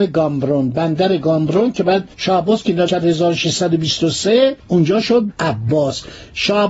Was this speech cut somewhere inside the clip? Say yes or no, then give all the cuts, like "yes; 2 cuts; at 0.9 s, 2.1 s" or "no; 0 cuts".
yes; 4 cuts; at 2.1 s, 2.9 s, 4.6 s, 5.3 s